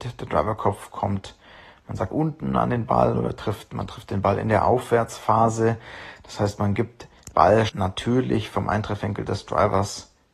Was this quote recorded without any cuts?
no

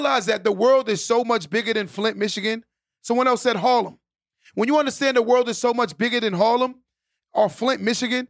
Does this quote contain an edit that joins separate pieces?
no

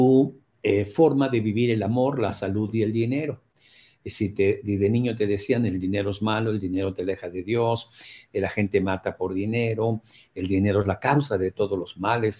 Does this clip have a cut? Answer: no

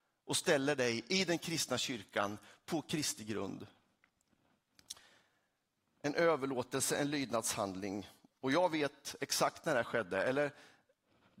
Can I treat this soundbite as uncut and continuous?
yes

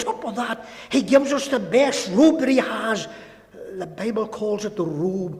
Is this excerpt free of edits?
yes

